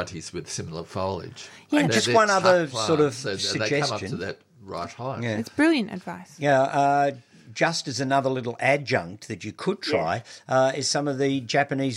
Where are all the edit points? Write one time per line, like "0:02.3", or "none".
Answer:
none